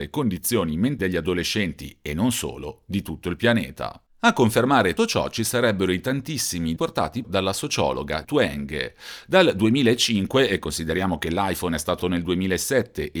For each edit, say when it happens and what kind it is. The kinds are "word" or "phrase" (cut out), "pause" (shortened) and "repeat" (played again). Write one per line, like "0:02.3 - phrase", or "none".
0:01.0 - word
0:05.0 - word
0:06.8 - word
0:07.2 - word
0:08.2 - word
0:12.0 - word